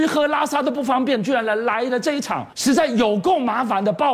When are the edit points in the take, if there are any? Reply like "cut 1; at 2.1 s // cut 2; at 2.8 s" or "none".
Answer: cut 1; at 2.5 s